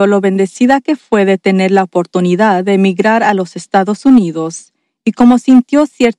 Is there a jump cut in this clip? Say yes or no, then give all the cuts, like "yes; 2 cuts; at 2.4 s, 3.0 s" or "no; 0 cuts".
no; 0 cuts